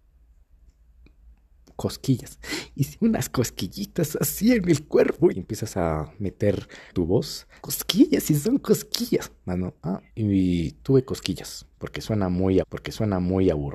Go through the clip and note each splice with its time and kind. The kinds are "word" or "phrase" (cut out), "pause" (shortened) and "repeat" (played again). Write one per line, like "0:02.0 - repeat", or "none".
0:02.9 - phrase
0:05.3 - word
0:06.9 - word
0:07.6 - word
0:10.1 - pause
0:12.6 - repeat